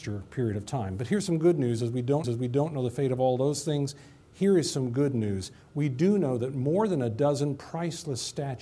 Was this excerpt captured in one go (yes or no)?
no